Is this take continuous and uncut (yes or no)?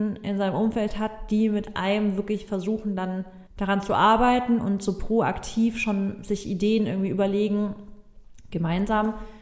no